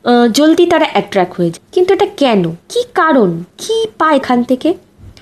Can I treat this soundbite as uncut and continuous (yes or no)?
no